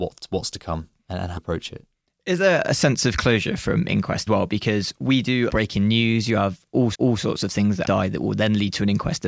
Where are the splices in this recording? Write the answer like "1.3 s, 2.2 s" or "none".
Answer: 1.0 s, 1.4 s, 4.3 s, 5.5 s, 6.9 s, 7.8 s